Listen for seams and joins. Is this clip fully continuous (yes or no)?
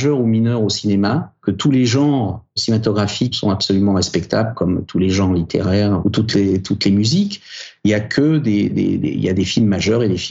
no